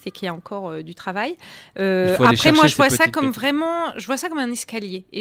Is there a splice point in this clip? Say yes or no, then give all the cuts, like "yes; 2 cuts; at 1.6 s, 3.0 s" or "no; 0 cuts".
no; 0 cuts